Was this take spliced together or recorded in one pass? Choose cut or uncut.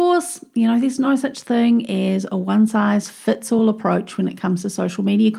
uncut